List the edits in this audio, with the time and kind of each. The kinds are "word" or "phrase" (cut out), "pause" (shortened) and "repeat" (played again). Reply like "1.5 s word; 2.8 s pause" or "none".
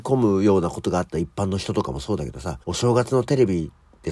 2.6 s pause